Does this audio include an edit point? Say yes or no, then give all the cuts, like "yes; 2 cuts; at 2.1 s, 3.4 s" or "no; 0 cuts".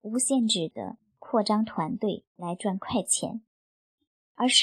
yes; 1 cut; at 2.3 s